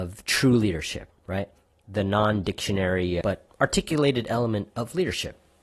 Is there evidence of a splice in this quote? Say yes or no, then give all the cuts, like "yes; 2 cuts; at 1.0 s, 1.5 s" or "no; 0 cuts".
yes; 1 cut; at 3.2 s